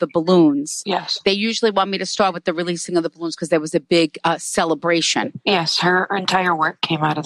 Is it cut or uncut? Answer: uncut